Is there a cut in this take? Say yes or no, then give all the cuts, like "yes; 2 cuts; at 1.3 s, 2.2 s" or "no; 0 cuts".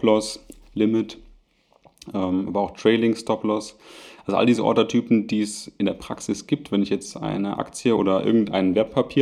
no; 0 cuts